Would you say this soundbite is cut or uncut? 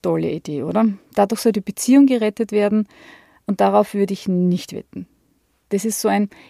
uncut